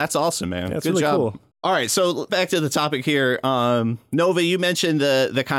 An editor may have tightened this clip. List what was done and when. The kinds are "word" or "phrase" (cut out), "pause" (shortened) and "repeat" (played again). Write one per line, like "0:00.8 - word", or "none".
0:01.5 - pause
0:02.3 - phrase

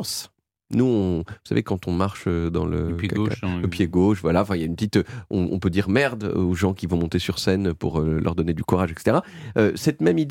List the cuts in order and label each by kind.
none

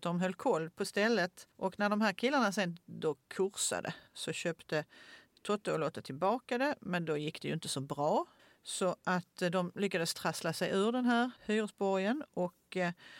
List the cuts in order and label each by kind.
0:01.5 - pause
0:04.1 - pause
0:08.4 - pause
0:11.4 - pause

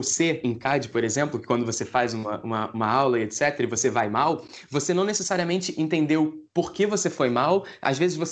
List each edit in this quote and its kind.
none

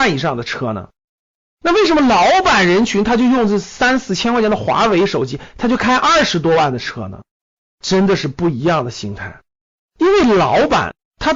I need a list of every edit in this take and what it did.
none

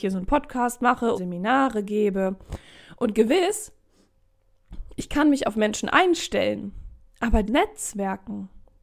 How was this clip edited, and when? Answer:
0:01.2 - word
0:07.5 - word

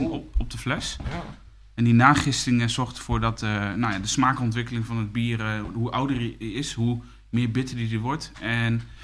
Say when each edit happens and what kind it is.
none

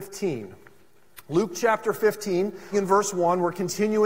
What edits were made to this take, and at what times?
0:02.7 - word

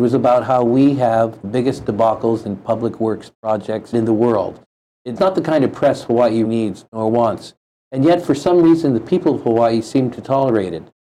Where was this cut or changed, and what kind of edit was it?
0:01.4 - phrase
0:03.9 - phrase
0:05.2 - word
0:06.4 - word

